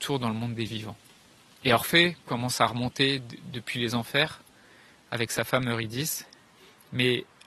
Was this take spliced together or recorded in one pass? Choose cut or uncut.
uncut